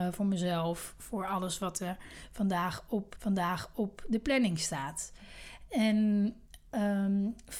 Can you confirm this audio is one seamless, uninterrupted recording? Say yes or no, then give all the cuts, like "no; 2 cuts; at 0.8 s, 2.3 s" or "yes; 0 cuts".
no; 1 cut; at 3.2 s